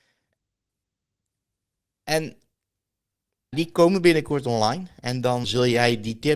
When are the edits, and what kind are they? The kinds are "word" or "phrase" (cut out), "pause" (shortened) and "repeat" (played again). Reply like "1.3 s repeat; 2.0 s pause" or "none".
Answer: 3.5 s word; 5.4 s word